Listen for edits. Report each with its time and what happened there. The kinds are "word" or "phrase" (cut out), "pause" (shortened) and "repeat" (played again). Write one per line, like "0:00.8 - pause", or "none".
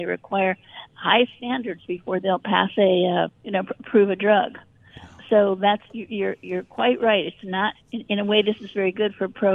0:03.3 - word
0:07.8 - word